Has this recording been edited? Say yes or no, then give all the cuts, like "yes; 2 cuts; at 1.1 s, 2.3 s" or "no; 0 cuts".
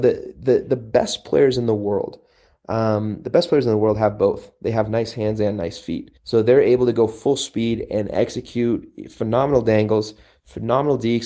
yes; 1 cut; at 6.2 s